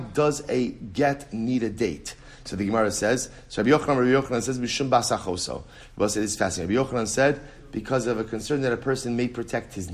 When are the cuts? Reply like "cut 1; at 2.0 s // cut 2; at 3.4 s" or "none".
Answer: none